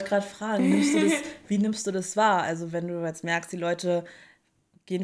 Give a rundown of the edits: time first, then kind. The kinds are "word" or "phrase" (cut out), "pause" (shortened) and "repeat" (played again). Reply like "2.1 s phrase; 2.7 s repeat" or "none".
none